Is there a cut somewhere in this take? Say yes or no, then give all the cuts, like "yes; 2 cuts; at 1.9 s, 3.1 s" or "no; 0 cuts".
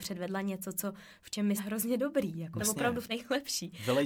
yes; 3 cuts; at 1.6 s, 2.6 s, 3.1 s